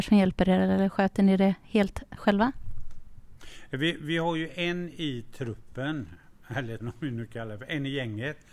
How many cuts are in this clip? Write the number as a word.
one